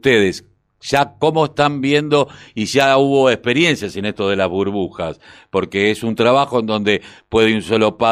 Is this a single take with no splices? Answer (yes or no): yes